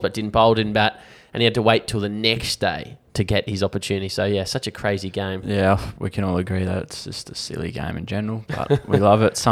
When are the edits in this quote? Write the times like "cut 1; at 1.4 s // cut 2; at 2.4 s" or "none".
none